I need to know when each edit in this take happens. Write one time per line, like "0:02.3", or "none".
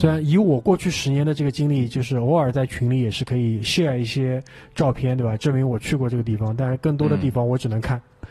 none